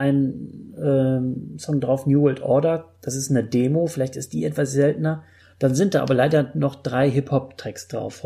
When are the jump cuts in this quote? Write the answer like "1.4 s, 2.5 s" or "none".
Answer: 5.4 s